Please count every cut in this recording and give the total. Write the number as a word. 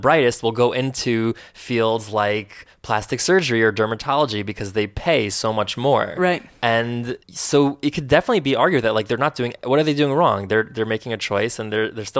one